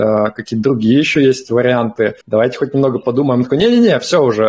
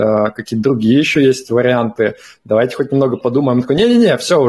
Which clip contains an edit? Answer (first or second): first